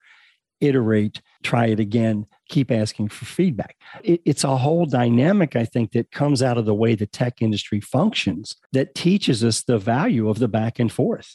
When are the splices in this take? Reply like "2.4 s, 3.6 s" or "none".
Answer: 4.0 s